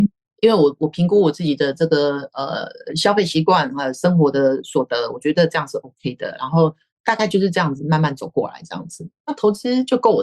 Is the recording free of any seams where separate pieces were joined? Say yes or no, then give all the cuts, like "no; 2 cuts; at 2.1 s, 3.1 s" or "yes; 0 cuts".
yes; 0 cuts